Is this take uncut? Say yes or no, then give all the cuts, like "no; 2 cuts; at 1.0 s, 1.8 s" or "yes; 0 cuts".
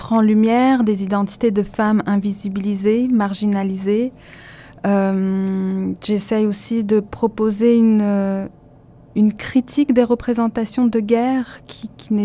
yes; 0 cuts